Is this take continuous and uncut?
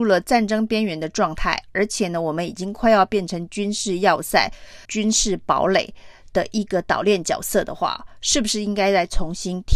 no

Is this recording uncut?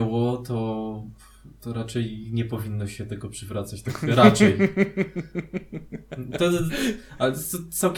yes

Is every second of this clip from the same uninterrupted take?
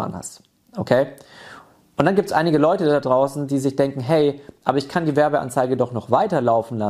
yes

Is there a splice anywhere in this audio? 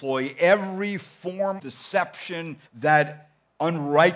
yes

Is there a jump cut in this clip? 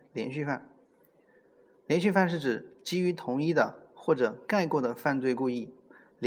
no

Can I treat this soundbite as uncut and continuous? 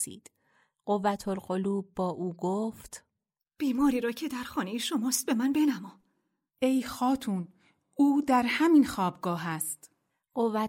yes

